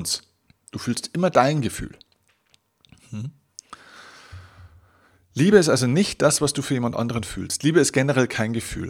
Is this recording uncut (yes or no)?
yes